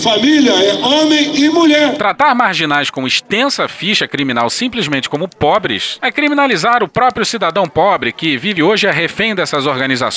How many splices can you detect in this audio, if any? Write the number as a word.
one